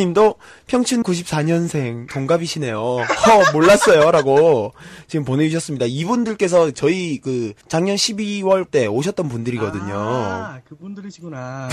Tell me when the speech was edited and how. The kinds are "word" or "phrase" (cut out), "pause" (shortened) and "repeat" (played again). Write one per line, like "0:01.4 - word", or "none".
0:01.0 - word
0:02.1 - word
0:06.7 - word
0:07.6 - pause
0:08.7 - word